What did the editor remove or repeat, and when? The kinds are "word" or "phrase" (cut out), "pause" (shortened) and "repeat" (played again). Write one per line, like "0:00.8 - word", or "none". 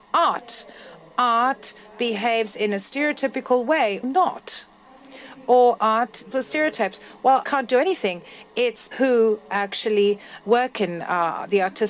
0:04.0 - word
0:05.8 - word
0:06.3 - word
0:07.4 - word
0:08.9 - word
0:10.4 - word